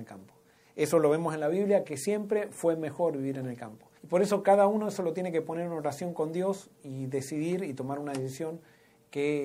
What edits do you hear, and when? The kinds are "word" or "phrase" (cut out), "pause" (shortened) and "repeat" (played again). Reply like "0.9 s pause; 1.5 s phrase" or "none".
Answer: 4.0 s pause